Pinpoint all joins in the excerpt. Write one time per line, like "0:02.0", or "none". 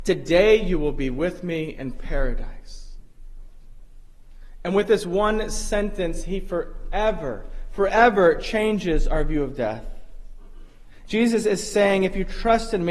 none